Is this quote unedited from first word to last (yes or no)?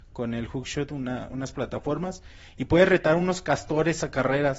yes